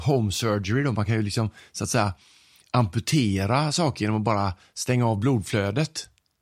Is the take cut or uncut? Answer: uncut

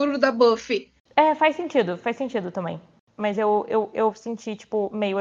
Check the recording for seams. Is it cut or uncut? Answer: uncut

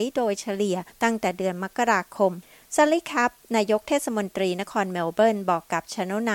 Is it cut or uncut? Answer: uncut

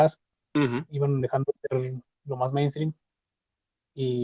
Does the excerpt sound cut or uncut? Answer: uncut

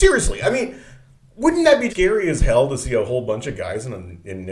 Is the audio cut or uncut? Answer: cut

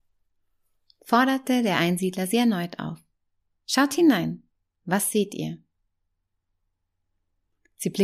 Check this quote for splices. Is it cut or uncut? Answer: uncut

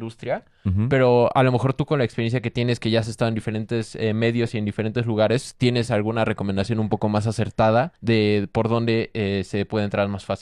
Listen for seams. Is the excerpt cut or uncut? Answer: cut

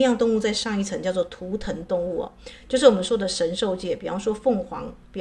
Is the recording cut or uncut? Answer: uncut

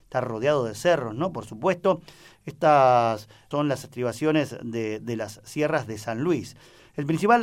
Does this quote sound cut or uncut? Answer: cut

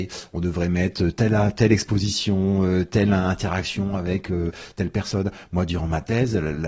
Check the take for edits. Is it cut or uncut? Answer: uncut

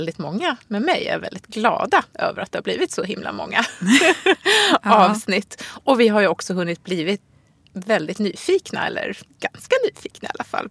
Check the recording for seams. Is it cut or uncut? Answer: uncut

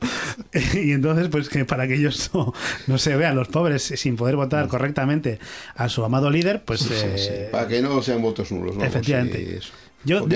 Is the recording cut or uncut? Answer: uncut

